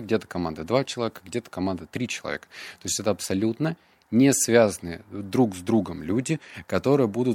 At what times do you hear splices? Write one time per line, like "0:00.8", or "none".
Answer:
none